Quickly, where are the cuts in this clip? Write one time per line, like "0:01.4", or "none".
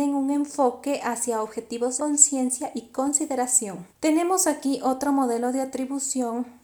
0:02.0
0:03.9